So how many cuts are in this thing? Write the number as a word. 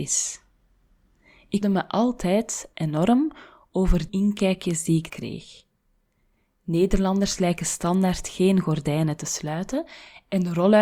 three